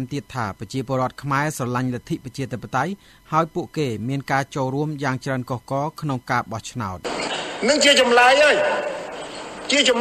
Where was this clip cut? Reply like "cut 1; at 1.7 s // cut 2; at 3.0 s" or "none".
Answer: none